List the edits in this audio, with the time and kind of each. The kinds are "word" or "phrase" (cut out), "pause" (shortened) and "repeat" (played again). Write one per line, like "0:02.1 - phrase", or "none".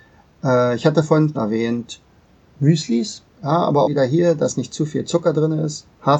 0:01.3 - word
0:03.3 - pause
0:03.9 - word